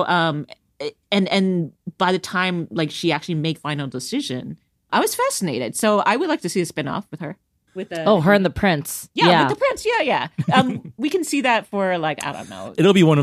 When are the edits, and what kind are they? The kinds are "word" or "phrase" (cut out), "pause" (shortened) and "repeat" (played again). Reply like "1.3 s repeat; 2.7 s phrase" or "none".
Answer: 3.6 s word; 4.9 s word